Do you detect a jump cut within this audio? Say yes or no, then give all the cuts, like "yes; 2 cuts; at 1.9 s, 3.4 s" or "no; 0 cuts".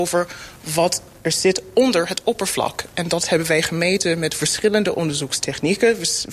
no; 0 cuts